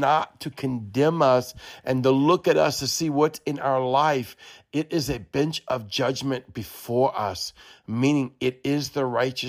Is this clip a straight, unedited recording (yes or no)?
yes